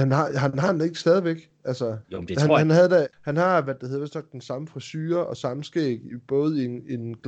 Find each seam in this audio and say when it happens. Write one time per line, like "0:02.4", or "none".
0:02.0
0:03.1